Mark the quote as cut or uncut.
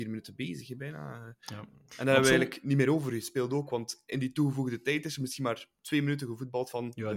cut